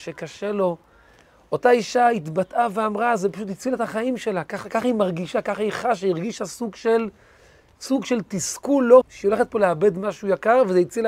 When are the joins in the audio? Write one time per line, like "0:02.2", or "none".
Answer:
0:09.0